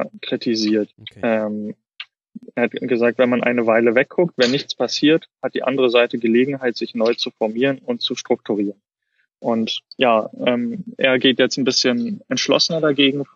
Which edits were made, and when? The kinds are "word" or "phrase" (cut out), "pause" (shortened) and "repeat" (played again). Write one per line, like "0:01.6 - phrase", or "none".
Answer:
0:00.9 - pause
0:09.9 - pause